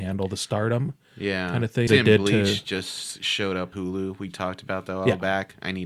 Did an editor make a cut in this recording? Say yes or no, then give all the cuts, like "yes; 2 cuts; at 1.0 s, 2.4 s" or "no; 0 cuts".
yes; 2 cuts; at 1.9 s, 3.7 s